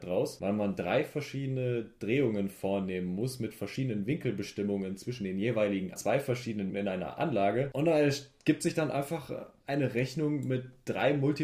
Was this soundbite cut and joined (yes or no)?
yes